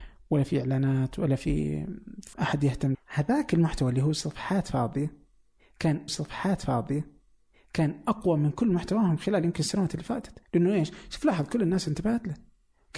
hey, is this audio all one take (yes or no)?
no